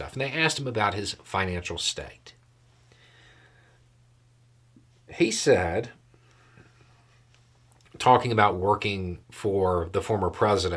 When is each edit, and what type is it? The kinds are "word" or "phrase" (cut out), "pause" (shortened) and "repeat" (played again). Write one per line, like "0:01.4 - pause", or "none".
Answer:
0:09.2 - pause